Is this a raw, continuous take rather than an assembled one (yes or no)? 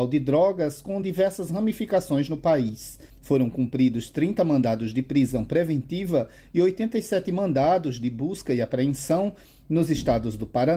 yes